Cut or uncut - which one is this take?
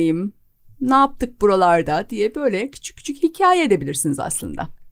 uncut